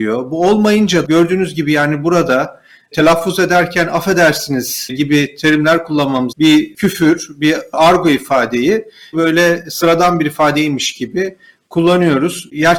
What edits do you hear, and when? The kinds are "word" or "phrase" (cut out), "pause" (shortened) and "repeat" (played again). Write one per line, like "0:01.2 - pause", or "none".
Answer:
0:01.0 - word
0:02.9 - word
0:06.3 - word
0:09.1 - word